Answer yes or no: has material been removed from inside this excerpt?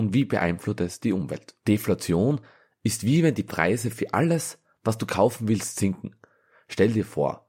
yes